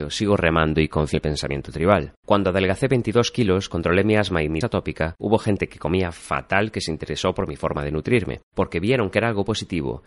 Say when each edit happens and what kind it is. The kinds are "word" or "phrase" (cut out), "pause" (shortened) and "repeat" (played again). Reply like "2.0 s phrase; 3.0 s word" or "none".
1.1 s word; 4.6 s word